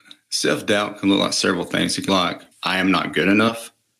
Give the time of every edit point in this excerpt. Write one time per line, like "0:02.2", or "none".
0:02.1
0:02.5

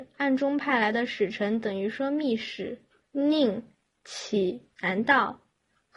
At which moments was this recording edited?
0:03.0

